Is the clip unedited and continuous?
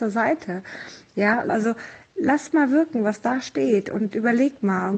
no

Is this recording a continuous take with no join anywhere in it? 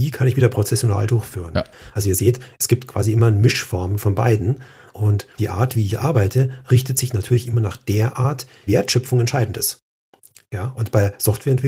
no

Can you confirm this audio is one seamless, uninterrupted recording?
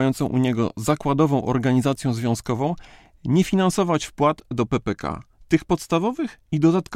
yes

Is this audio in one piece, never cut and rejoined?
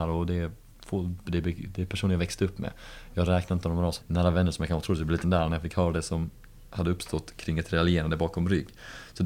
no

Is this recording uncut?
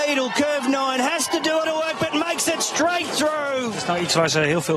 no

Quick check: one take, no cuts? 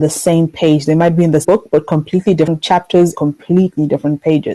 no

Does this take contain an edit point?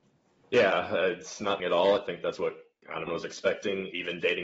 yes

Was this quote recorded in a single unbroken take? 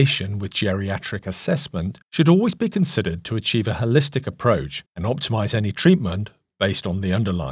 no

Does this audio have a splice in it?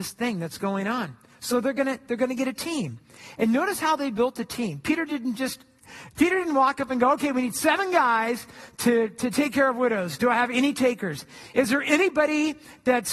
no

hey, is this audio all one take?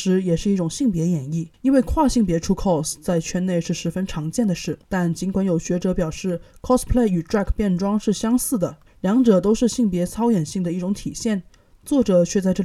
no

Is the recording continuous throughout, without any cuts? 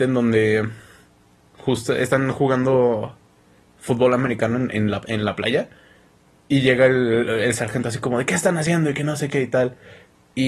yes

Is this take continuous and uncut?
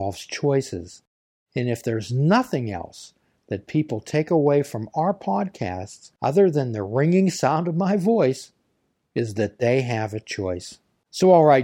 yes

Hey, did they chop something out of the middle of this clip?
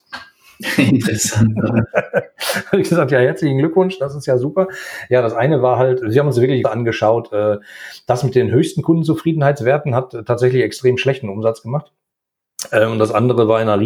yes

